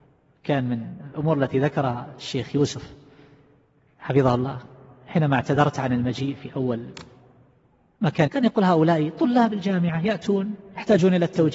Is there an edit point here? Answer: yes; 1 cut; at 8.3 s

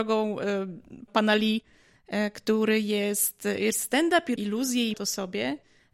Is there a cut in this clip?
yes; 4 cuts; at 1.1 s, 3.7 s, 4.4 s, 4.9 s

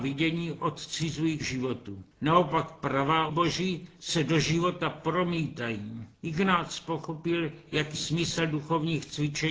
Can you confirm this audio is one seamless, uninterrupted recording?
no; 5 cuts; at 1.4 s, 2.1 s, 3.3 s, 6.1 s, 7.9 s

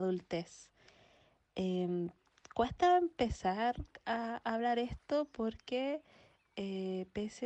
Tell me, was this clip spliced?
no; 0 cuts

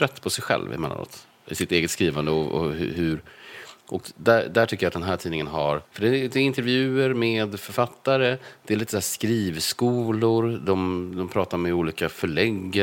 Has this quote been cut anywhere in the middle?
yes; 1 cut; at 5.8 s

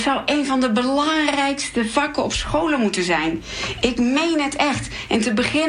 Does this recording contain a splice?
no; 0 cuts

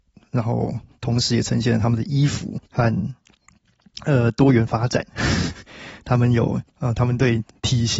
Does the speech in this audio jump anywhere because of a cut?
yes; 2 cuts; at 2.7 s, 6.7 s

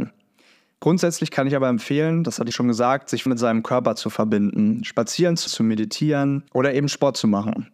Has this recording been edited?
yes; 4 cuts; at 2.5 s, 3.3 s, 5.5 s, 6.5 s

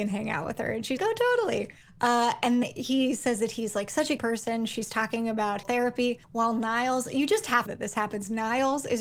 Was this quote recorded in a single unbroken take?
no; 6 cuts; at 1.0 s, 2.6 s, 4.2 s, 5.6 s, 6.2 s, 7.7 s

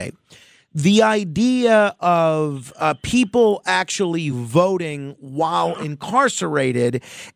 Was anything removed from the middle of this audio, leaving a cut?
no; 0 cuts

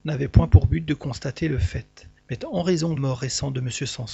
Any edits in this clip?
yes; 2 cuts; at 2.2 s, 3.0 s

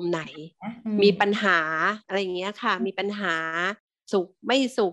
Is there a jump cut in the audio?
yes; 1 cut; at 2.0 s

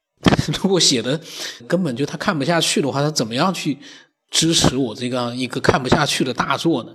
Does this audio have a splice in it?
yes; 1 cut; at 1.6 s

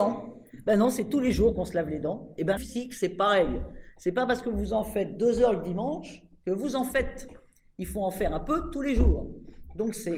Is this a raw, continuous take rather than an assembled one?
no; 1 cut; at 2.6 s

